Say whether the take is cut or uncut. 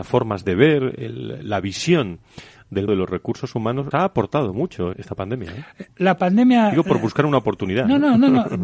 cut